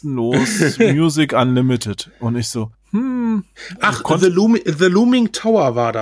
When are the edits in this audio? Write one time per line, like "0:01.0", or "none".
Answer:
0:02.7